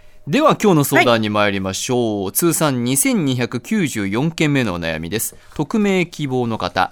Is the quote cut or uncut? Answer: uncut